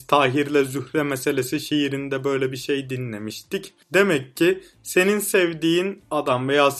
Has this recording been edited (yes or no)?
yes